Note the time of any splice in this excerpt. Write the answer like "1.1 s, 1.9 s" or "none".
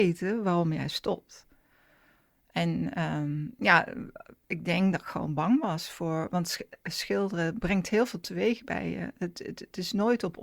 none